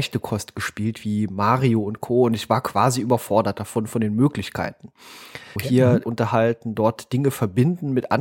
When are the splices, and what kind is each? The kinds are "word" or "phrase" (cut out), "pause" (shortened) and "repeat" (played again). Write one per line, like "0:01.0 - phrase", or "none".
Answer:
0:05.6 - word
0:06.0 - phrase

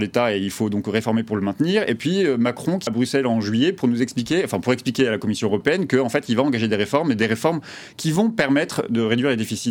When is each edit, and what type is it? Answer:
0:02.9 - word

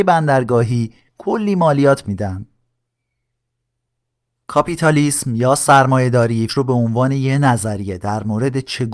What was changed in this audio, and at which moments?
0:02.0 - word
0:06.5 - word

